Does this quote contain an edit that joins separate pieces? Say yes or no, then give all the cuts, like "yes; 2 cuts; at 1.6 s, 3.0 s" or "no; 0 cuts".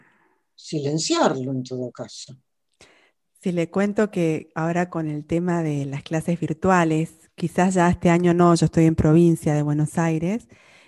no; 0 cuts